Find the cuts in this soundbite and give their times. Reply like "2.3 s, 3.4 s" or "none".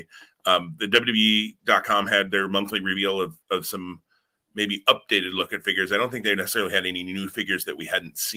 none